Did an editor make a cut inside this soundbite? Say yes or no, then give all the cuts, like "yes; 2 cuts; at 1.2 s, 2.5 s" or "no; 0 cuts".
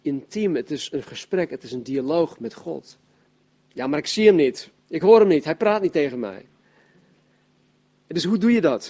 yes; 2 cuts; at 3.3 s, 4.8 s